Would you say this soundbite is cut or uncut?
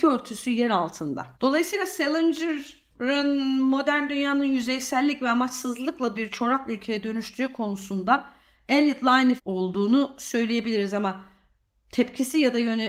cut